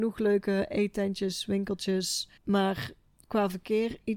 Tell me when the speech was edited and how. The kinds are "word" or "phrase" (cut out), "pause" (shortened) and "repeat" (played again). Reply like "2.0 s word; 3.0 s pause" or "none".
2.4 s pause

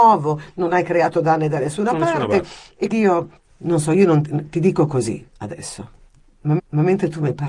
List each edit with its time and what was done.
2.9 s word; 3.4 s pause; 6.6 s repeat

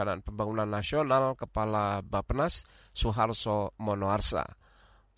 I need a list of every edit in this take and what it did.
none

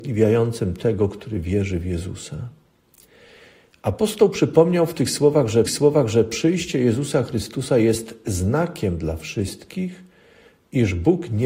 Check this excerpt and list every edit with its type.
5.7 s repeat

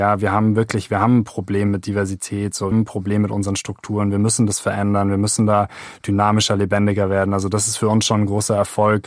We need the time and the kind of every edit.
2.7 s phrase

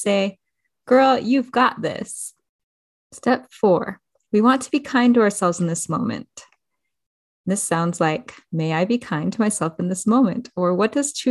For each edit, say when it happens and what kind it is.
none

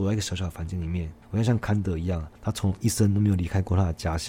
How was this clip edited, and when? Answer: 1.2 s pause; 2.4 s pause

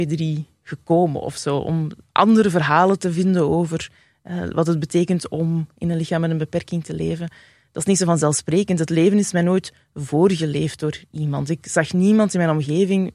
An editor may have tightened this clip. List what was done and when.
none

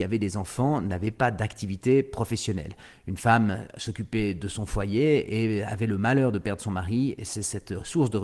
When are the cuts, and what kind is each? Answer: none

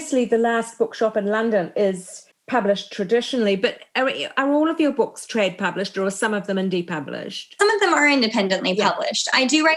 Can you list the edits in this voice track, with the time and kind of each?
none

